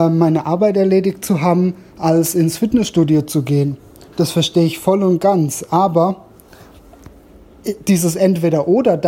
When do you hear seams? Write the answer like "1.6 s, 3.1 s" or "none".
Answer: none